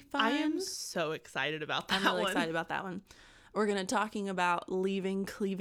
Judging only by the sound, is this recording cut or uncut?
uncut